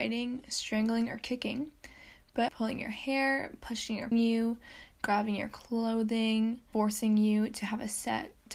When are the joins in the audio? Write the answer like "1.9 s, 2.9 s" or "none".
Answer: 2.5 s, 4.1 s, 6.7 s